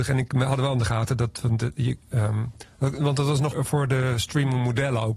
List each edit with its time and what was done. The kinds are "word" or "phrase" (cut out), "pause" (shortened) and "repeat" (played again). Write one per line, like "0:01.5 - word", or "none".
0:03.5 - word